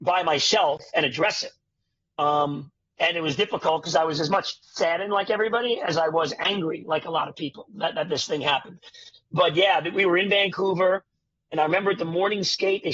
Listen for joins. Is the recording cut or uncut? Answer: uncut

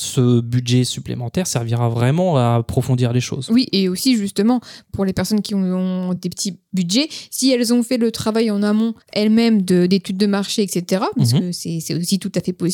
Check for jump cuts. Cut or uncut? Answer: cut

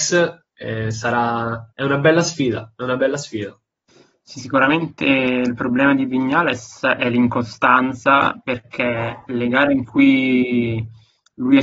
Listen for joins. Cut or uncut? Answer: cut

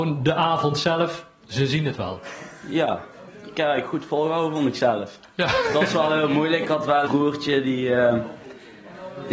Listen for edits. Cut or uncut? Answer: cut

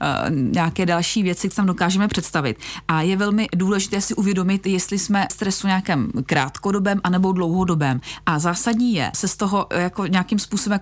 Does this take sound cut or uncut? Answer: cut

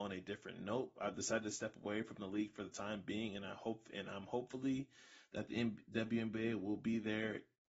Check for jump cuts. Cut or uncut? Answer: uncut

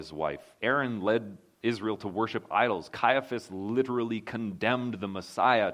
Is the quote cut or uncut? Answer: uncut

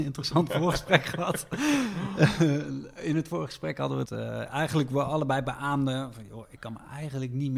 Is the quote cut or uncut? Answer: cut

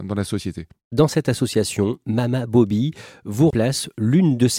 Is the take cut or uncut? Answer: cut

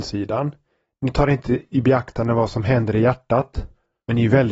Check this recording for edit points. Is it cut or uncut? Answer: uncut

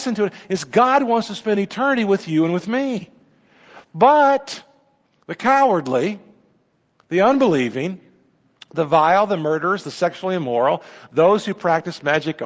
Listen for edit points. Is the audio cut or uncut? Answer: uncut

